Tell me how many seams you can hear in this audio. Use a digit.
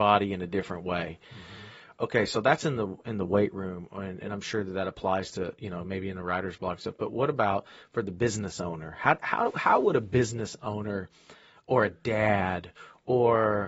0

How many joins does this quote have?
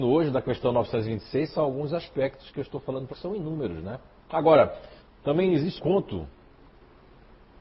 3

